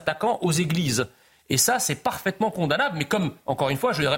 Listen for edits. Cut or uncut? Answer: uncut